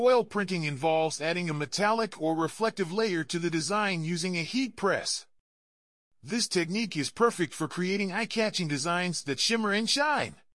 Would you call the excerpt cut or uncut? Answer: uncut